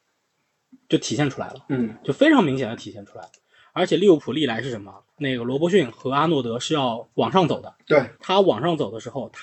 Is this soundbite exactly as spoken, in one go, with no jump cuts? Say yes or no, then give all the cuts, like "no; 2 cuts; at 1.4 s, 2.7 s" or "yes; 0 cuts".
no; 3 cuts; at 5.1 s, 7.1 s, 8.1 s